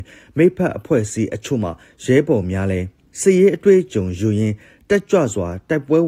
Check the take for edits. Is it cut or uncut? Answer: uncut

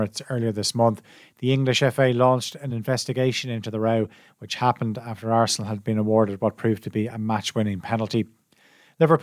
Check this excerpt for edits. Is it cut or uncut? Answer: uncut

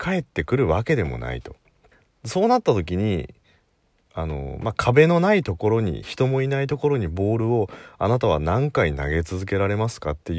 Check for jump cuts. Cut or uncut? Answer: cut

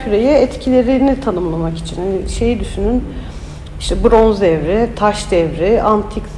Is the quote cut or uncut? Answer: uncut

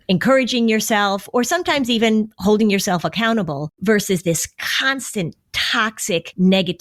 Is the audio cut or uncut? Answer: cut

